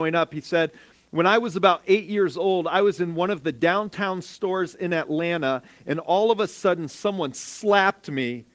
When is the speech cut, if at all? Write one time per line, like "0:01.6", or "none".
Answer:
none